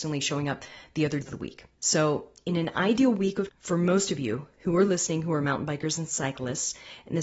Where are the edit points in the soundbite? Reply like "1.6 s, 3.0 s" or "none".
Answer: 1.2 s, 1.7 s, 3.5 s